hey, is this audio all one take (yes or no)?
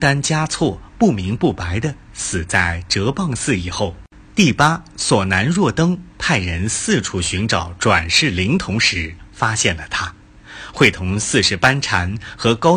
no